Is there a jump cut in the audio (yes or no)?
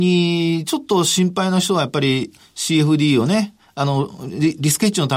no